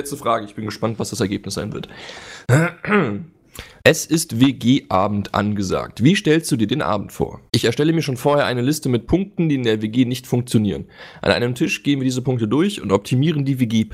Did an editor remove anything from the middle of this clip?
yes; 1 cut; at 7.5 s

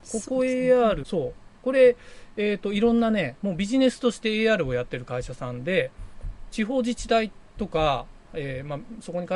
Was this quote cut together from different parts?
yes; 1 cut; at 1.0 s

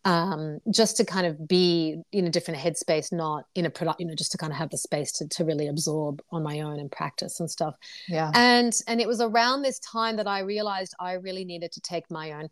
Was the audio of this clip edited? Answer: yes; 1 cut; at 4.0 s

